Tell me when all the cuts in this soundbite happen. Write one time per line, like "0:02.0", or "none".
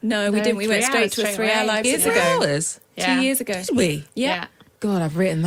0:01.8